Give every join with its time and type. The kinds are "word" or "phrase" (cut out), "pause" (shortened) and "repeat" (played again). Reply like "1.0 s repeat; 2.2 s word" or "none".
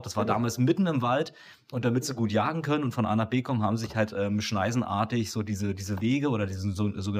none